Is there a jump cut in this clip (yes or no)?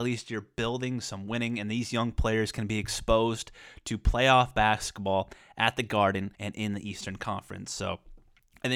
yes